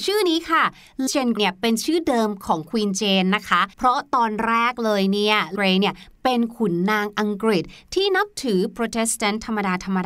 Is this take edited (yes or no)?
yes